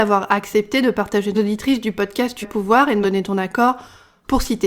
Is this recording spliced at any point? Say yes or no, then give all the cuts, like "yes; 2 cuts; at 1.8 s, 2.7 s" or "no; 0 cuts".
yes; 3 cuts; at 1.3 s, 2.4 s, 3.0 s